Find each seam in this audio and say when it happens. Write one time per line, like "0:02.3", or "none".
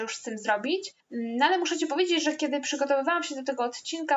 0:01.0